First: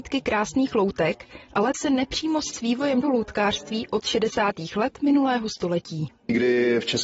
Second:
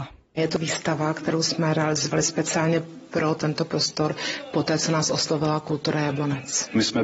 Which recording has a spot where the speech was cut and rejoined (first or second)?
first